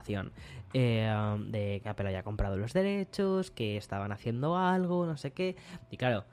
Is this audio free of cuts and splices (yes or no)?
no